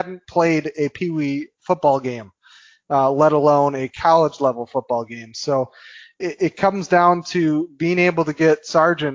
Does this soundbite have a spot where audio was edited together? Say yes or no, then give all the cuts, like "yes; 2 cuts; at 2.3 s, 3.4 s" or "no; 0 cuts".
no; 0 cuts